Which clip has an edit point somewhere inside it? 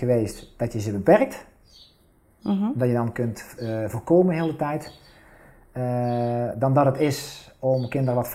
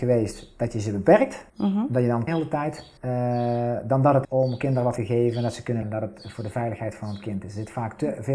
second; 6 cuts; at 1.5 s, 2.3 s, 3.0 s, 4.2 s, 5.0 s, 5.8 s

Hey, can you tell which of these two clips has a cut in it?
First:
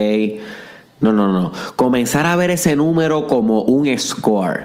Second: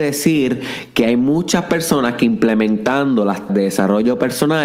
second; 1 cut; at 3.5 s

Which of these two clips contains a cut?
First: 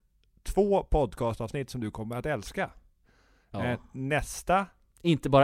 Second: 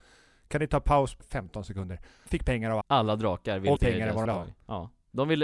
second; 5 cuts; at 1.2 s, 2.3 s, 2.8 s, 3.8 s, 4.3 s

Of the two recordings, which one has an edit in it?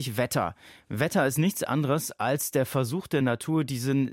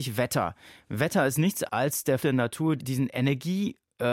second; 3 cuts; at 1.7 s, 2.2 s, 2.8 s

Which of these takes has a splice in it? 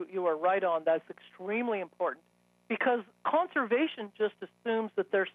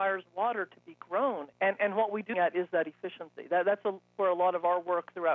second; 2 cuts; at 1.5 s, 2.3 s

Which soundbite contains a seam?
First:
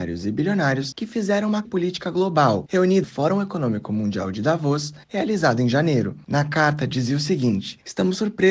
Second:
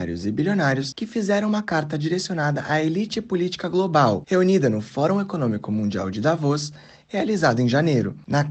first; 3 cuts; at 1.6 s, 3.0 s, 5.0 s

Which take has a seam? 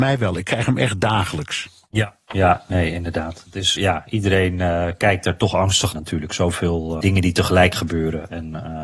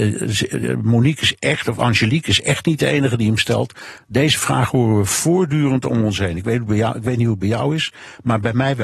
first; 3 cuts; at 3.8 s, 5.9 s, 7.0 s

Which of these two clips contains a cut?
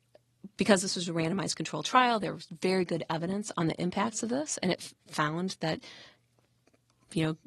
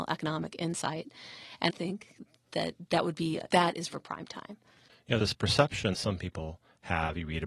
second; 5 cuts; at 1.7 s, 3.5 s, 3.9 s, 5.2 s, 5.9 s

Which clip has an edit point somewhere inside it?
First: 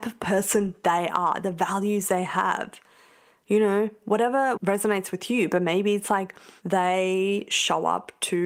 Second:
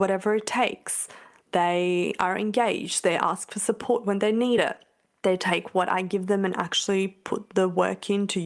first; 1 cut; at 4.6 s

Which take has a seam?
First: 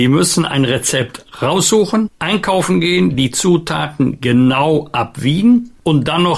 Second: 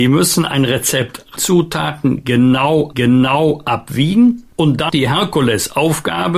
second; 3 cuts; at 1.4 s, 2.9 s, 4.9 s

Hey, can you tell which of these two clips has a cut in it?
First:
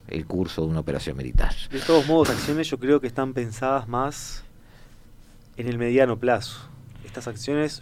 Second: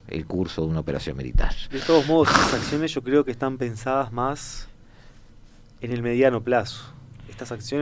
first; 1 cut; at 2.2 s

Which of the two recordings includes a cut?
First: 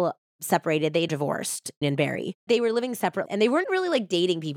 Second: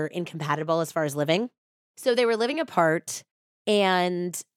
first; 5 cuts; at 1.1 s, 1.8 s, 2.5 s, 3.3 s, 3.6 s

